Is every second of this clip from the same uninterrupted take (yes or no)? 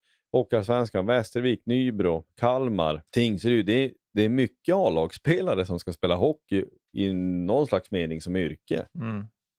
no